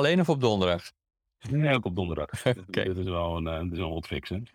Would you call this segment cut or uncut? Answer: uncut